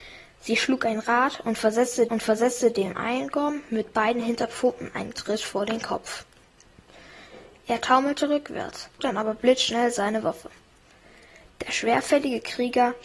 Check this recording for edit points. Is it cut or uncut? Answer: cut